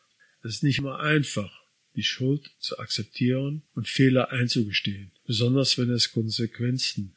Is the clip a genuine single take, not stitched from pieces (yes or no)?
no